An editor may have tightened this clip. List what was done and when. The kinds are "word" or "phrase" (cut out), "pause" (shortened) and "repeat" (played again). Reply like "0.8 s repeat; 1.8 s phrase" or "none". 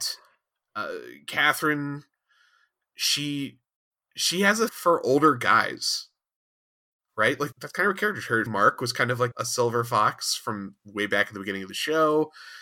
4.7 s word; 7.5 s word; 8.5 s word; 9.3 s word